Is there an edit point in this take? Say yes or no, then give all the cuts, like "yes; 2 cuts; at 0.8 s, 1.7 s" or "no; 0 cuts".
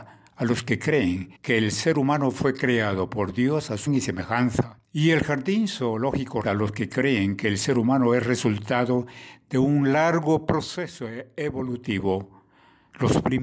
yes; 4 cuts; at 1.3 s, 3.9 s, 4.8 s, 6.4 s